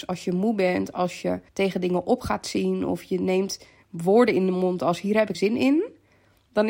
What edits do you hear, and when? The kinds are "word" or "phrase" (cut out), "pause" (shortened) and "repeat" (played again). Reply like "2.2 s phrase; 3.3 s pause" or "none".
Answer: 1.5 s pause; 5.3 s word